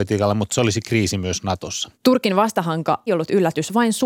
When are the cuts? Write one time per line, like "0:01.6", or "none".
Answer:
0:01.9
0:03.1